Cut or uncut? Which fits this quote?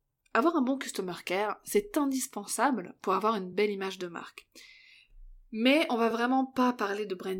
uncut